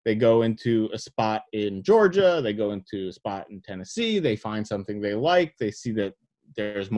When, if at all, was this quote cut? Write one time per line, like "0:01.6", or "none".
none